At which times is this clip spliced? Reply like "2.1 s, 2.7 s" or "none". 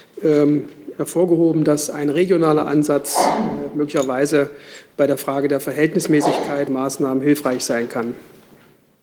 0.9 s, 6.7 s